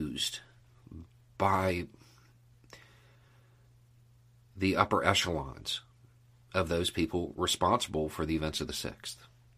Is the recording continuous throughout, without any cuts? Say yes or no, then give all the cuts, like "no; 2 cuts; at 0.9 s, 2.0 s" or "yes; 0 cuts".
yes; 0 cuts